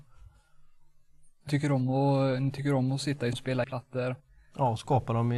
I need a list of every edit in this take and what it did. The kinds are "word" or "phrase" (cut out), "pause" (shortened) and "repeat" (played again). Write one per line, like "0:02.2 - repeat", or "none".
0:01.5 - word
0:03.3 - word
0:03.6 - word